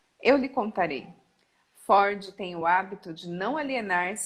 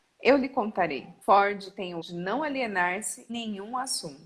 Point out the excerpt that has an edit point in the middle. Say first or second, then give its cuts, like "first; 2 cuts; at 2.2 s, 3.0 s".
second; 3 cuts; at 1.2 s, 2.0 s, 3.3 s